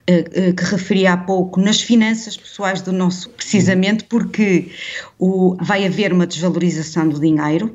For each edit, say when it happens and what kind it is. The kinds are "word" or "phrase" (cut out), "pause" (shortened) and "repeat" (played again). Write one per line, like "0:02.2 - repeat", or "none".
0:03.3 - word
0:05.6 - word